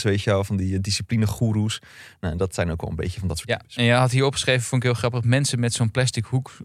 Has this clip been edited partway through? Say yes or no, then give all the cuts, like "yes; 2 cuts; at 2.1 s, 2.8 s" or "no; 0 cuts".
no; 0 cuts